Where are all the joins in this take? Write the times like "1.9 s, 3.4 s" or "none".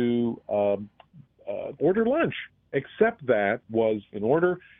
1.8 s, 3.7 s